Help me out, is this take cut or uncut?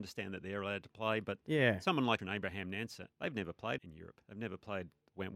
cut